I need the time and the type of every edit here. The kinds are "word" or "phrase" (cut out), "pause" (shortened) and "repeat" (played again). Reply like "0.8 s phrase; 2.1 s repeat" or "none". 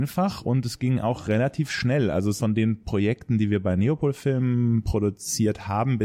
2.4 s word